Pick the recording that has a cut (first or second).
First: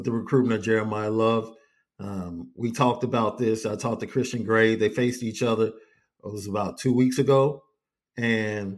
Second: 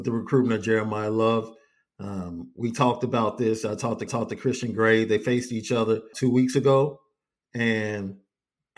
second